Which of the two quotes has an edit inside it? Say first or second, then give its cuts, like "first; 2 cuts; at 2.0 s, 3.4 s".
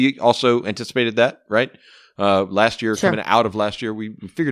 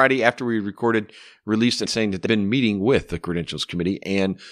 second; 2 cuts; at 1.9 s, 2.3 s